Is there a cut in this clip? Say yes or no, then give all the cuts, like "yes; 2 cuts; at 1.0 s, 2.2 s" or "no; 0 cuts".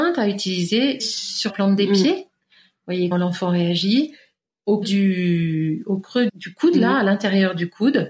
yes; 5 cuts; at 1.0 s, 1.5 s, 3.1 s, 4.8 s, 6.3 s